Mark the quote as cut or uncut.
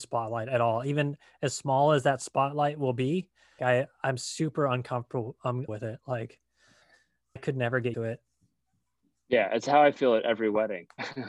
cut